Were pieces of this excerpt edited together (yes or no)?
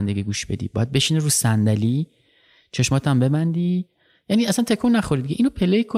no